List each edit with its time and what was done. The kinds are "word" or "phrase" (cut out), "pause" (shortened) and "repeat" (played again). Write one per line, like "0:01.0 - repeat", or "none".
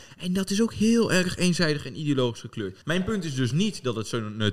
0:02.8 - pause